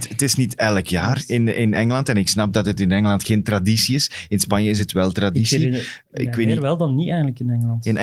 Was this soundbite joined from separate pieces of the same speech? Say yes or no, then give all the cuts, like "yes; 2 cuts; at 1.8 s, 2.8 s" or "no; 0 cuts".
no; 0 cuts